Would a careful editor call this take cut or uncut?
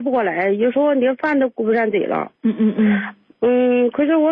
cut